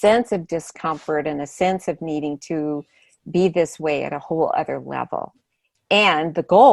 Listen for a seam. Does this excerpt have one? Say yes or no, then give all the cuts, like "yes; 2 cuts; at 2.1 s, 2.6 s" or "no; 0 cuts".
no; 0 cuts